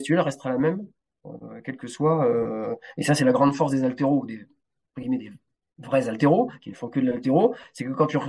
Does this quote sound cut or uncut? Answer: uncut